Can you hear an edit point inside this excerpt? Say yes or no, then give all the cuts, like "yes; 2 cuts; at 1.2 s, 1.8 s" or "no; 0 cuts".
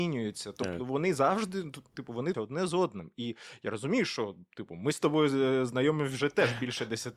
yes; 1 cut; at 2.3 s